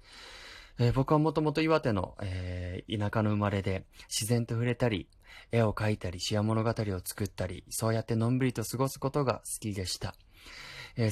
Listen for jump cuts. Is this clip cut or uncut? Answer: uncut